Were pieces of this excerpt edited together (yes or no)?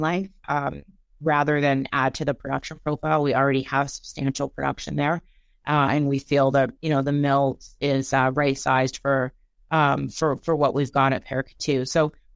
no